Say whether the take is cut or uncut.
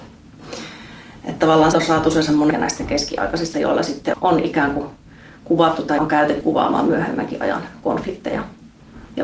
cut